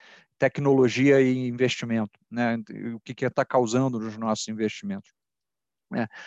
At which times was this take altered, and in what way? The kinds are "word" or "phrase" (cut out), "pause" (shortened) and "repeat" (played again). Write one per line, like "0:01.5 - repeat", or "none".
0:03.3 - word